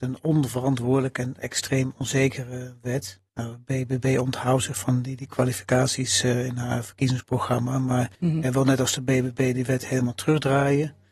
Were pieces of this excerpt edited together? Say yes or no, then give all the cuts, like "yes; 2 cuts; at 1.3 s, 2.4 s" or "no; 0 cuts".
yes; 2 cuts; at 3.3 s, 8.1 s